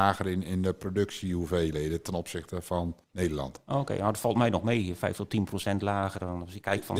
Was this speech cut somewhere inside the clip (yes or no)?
yes